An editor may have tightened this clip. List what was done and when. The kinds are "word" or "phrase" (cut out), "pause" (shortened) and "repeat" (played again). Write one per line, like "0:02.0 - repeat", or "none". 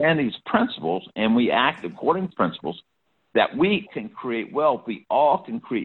0:02.3 - word
0:03.9 - word